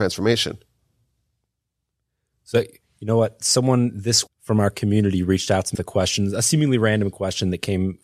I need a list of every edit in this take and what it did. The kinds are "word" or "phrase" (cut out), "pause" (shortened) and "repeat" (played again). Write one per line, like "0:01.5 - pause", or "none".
0:04.3 - word
0:05.7 - word